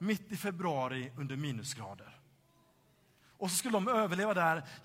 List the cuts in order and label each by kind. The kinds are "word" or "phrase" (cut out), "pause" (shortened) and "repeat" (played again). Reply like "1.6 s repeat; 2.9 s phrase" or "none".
none